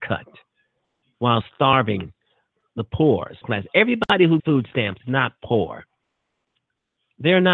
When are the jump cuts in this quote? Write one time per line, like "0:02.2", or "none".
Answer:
0:02.7
0:03.4
0:04.4
0:05.0